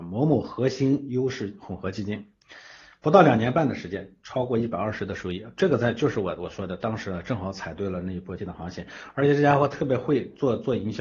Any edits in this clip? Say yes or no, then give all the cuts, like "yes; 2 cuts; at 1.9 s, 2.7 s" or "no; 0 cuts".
yes; 1 cut; at 8.4 s